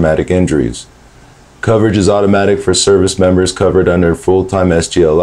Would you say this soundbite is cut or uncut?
uncut